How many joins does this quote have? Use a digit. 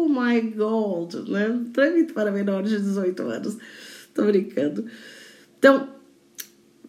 0